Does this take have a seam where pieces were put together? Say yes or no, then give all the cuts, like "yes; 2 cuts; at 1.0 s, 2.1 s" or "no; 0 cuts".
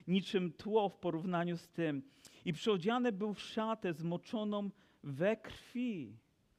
no; 0 cuts